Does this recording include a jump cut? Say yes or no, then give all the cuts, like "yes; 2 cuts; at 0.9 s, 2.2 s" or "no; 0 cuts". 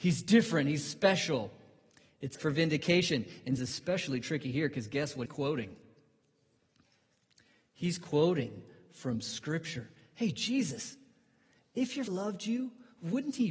yes; 4 cuts; at 2.3 s, 3.6 s, 5.3 s, 12.1 s